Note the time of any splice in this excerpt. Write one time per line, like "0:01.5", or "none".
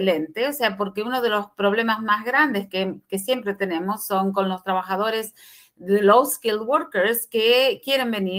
none